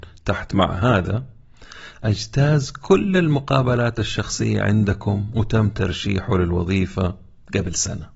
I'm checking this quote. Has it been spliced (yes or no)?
no